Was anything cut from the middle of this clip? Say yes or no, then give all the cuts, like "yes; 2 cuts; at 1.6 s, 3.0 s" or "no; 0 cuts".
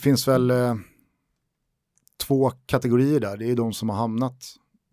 no; 0 cuts